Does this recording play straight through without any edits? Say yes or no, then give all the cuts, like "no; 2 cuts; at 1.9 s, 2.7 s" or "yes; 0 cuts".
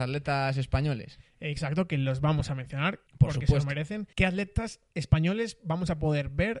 no; 2 cuts; at 3.1 s, 4.1 s